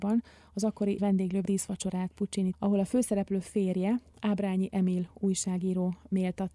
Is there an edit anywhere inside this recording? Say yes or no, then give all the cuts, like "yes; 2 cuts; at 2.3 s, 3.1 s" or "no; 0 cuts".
yes; 3 cuts; at 1.0 s, 1.5 s, 2.5 s